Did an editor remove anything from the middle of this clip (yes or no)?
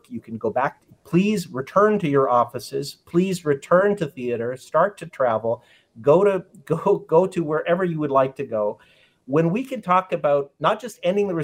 no